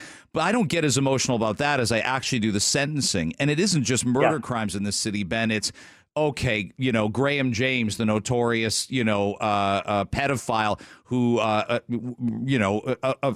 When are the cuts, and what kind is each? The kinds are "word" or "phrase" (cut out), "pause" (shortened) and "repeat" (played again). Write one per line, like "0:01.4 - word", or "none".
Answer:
none